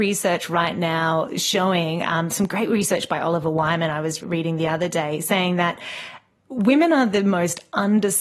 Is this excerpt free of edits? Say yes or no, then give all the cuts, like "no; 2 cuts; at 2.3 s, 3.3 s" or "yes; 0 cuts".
yes; 0 cuts